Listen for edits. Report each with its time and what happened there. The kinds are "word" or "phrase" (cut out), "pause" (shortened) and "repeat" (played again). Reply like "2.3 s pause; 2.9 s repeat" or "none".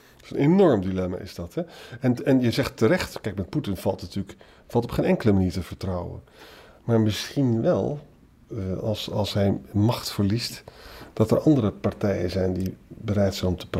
none